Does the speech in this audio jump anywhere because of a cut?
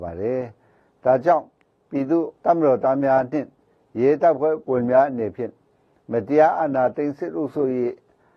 no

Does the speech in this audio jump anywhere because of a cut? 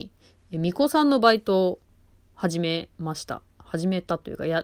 no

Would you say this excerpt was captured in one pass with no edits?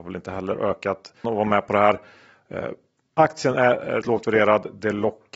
no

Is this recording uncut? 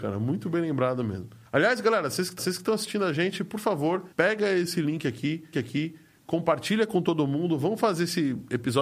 no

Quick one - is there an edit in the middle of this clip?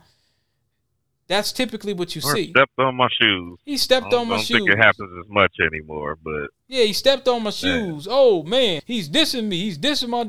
yes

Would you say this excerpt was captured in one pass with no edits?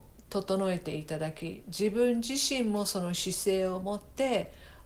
yes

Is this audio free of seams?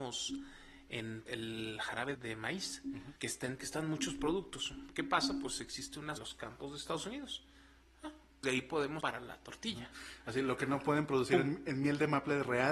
no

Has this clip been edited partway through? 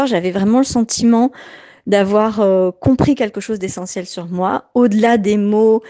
no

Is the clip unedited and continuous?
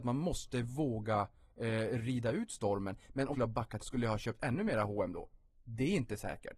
no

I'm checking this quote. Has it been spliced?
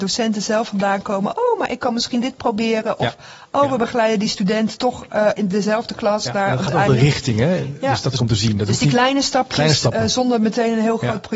yes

